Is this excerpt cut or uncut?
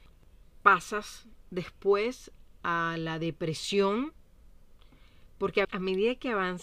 cut